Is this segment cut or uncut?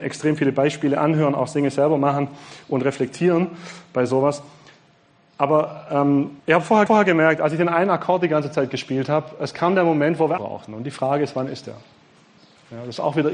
cut